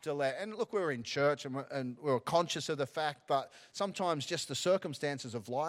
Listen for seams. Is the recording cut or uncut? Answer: uncut